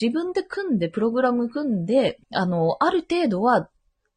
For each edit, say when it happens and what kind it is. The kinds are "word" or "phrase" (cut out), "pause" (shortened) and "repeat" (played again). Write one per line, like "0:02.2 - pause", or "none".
0:02.2 - pause